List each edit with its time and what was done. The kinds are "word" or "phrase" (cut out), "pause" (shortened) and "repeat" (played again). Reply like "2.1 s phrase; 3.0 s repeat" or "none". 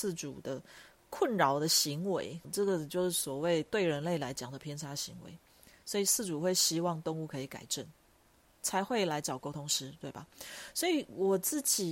2.4 s word